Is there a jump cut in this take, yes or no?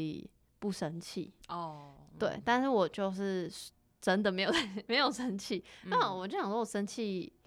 no